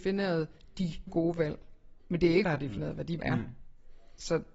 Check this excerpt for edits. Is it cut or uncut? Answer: cut